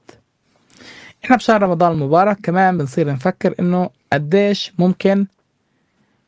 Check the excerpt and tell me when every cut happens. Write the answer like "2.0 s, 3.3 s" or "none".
none